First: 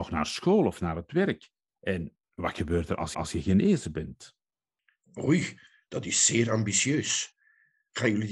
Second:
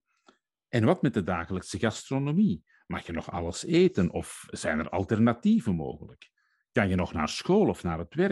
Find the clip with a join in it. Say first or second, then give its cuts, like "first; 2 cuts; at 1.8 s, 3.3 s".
first; 1 cut; at 3.1 s